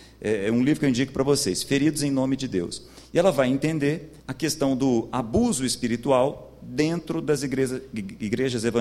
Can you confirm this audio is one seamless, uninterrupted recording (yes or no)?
no